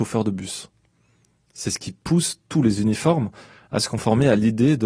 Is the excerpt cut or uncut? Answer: uncut